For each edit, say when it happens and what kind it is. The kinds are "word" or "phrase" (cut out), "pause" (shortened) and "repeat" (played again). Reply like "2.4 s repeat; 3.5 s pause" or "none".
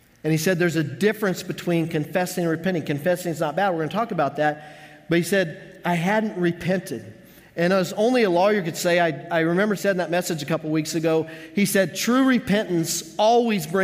9.8 s word